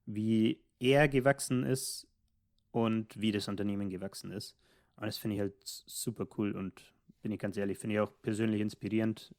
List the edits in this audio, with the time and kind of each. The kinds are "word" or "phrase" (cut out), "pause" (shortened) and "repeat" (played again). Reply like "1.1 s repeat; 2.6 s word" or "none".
none